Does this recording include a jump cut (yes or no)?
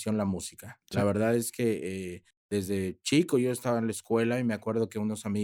no